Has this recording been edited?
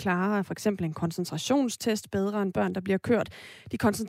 no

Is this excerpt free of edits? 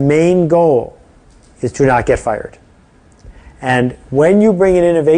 yes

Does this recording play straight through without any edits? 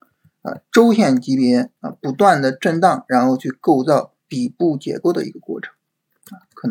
no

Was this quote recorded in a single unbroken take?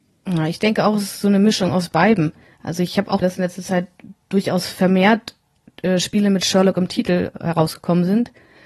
no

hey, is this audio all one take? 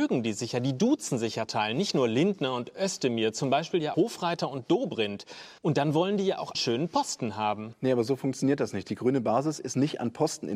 no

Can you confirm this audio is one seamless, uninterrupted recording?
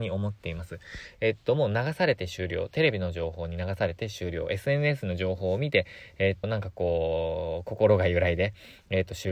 no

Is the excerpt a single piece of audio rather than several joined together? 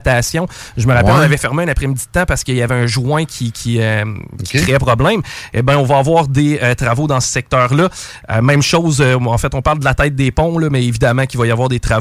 yes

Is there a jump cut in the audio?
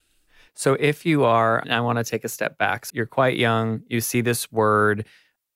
yes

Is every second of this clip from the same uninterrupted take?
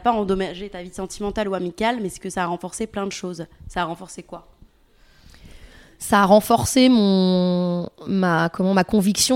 yes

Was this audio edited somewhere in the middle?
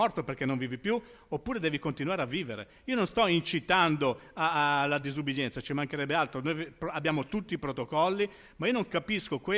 no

